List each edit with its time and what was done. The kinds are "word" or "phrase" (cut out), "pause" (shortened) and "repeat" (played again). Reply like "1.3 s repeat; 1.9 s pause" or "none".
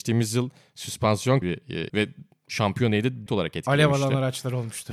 1.4 s word; 1.9 s word; 3.3 s word